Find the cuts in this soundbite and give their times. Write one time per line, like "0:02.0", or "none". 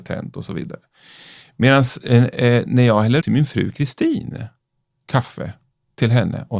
0:03.2